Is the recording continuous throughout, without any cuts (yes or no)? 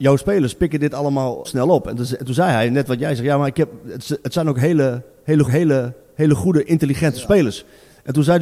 no